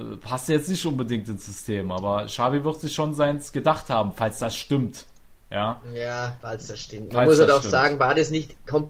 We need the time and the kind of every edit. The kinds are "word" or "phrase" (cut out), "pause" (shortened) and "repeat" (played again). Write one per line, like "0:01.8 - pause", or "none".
none